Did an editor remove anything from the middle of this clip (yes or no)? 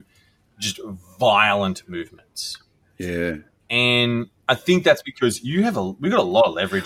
no